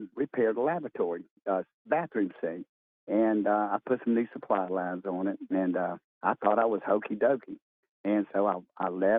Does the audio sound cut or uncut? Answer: uncut